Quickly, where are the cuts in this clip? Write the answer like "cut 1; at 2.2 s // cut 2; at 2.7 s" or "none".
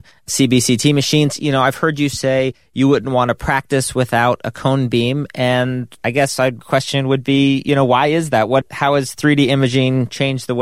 none